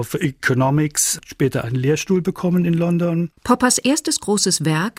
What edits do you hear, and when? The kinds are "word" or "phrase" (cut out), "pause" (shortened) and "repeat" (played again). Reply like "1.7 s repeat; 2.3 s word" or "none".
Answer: 3.4 s pause